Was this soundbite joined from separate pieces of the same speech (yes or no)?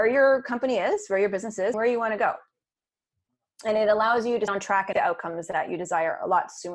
yes